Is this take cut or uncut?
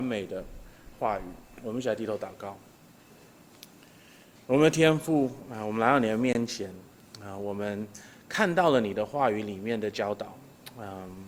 uncut